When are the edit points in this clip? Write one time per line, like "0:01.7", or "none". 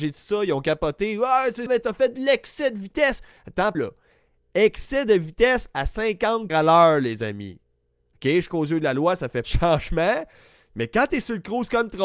0:01.7
0:03.7
0:06.5
0:08.5
0:09.4